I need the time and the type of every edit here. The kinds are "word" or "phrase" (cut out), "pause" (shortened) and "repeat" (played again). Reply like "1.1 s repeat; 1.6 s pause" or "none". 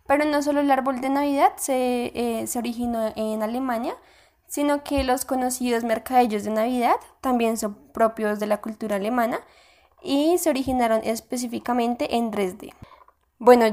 none